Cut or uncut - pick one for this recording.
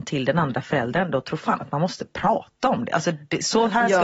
uncut